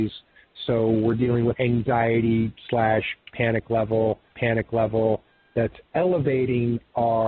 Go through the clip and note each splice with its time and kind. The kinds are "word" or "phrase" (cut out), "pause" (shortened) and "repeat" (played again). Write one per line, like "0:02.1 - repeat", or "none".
0:01.5 - phrase
0:04.3 - repeat